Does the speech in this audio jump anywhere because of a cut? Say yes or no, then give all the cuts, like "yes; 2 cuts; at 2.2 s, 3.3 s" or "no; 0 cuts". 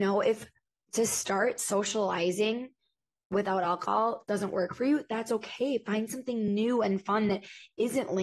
no; 0 cuts